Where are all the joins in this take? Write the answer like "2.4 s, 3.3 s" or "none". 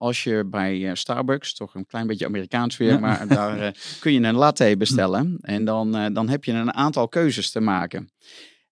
none